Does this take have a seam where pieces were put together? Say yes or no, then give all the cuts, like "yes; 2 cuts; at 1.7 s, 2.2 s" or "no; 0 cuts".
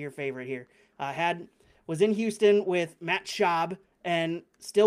no; 0 cuts